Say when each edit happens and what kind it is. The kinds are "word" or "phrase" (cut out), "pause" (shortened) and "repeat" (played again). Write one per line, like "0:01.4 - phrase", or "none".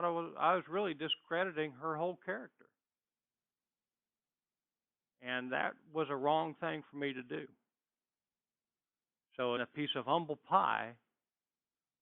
0:09.6 - word